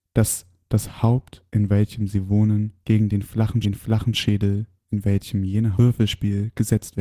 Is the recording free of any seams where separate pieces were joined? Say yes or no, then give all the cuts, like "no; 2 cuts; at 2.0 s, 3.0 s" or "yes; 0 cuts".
no; 4 cuts; at 1.5 s, 2.8 s, 3.6 s, 5.7 s